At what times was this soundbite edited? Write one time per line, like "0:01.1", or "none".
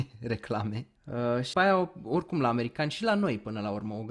0:01.0
0:01.5